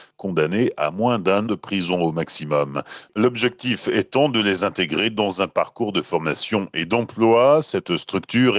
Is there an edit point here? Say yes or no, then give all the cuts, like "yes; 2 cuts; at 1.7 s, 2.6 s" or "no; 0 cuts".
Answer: yes; 1 cut; at 1.5 s